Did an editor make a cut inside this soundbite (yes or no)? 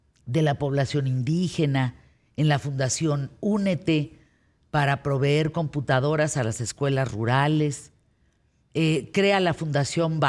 no